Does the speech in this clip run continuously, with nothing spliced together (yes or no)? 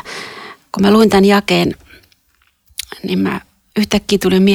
yes